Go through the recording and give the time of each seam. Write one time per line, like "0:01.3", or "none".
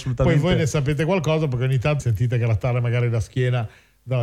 0:02.0